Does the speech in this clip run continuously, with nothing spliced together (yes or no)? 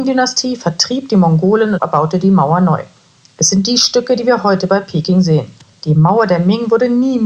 yes